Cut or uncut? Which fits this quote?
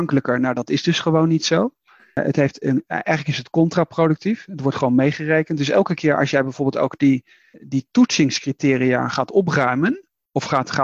uncut